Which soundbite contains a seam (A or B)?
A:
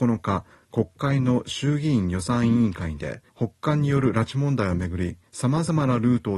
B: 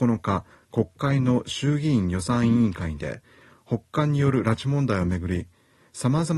A